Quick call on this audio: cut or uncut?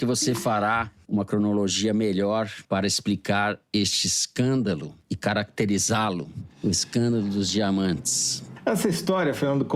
uncut